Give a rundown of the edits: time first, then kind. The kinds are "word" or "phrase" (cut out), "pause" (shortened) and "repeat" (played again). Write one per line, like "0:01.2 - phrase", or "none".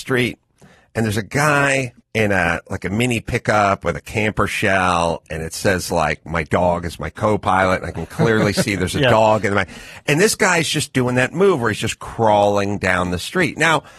0:02.0 - pause